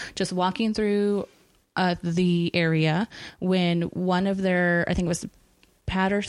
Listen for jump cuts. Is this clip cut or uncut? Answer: uncut